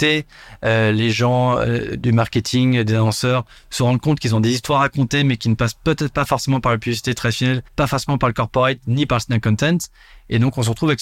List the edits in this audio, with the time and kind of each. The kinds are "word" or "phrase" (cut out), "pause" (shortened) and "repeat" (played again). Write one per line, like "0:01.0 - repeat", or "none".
0:07.7 - pause